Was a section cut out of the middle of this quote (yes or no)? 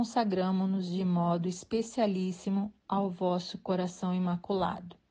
no